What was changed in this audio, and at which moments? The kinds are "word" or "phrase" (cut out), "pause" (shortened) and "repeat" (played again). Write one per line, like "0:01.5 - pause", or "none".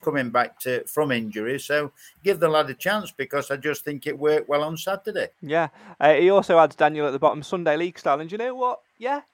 0:05.3 - pause